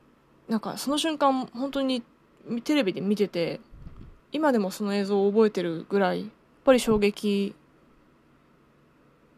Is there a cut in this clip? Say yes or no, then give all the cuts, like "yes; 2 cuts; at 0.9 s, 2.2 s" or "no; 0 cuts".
yes; 2 cuts; at 4.2 s, 6.4 s